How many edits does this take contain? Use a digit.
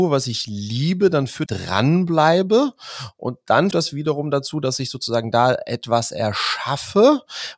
2